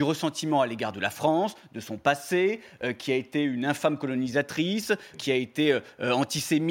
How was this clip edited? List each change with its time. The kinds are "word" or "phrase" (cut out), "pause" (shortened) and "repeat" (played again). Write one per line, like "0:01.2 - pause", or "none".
0:05.1 - word